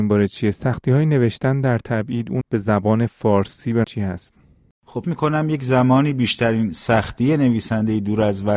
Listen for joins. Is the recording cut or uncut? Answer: cut